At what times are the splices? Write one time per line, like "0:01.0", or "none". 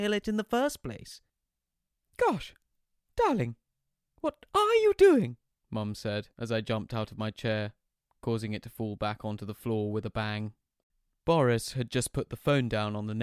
0:05.6
0:06.3